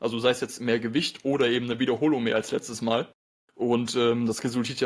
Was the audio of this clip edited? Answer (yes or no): no